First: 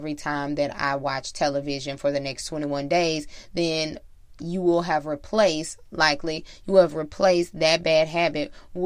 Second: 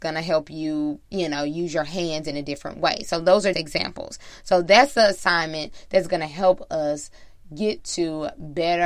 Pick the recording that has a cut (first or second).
second